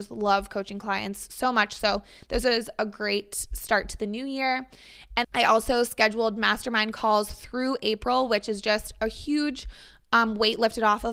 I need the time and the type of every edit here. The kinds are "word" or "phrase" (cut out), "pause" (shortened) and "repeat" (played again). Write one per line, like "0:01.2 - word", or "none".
0:05.2 - word